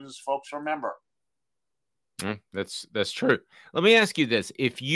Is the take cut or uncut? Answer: uncut